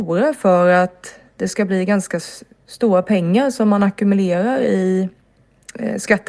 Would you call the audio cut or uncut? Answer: uncut